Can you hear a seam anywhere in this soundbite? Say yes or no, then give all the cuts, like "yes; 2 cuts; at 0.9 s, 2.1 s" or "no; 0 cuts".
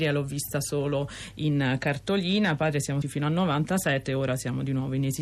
yes; 2 cuts; at 2.6 s, 3.0 s